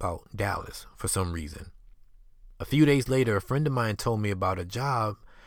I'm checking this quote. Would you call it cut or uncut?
uncut